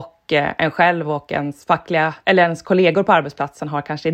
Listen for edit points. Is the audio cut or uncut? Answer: uncut